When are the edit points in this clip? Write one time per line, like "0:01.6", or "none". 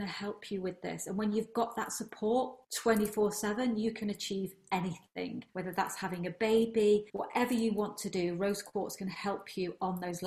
0:02.6
0:05.5
0:07.1

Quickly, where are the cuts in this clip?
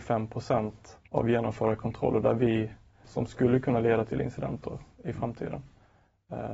0:01.1
0:03.0

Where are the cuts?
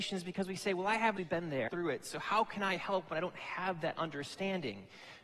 0:01.2
0:01.7

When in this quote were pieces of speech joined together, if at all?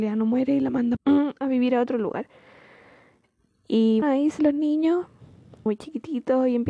0:01.0
0:04.0
0:04.4
0:05.7

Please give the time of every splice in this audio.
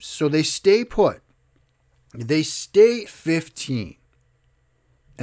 0:03.1

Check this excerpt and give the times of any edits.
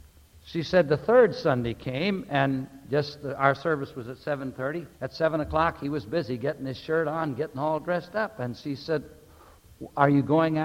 0:04.9

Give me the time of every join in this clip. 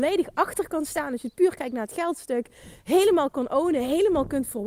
none

